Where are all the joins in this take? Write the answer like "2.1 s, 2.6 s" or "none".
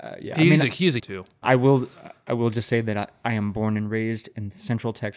1.0 s, 1.4 s